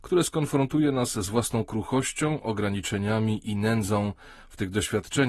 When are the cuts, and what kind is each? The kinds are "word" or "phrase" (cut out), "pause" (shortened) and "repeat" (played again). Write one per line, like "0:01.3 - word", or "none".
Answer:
none